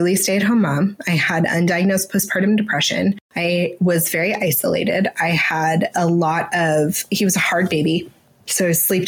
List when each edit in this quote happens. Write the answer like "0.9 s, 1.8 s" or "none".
none